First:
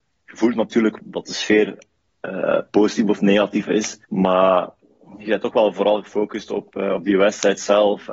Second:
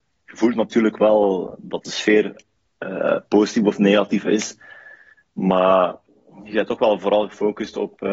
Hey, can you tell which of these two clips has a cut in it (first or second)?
first